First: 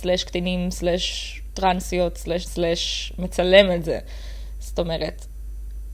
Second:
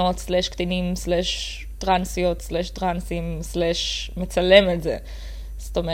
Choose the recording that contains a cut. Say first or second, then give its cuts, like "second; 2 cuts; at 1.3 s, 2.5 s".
first; 1 cut; at 2.5 s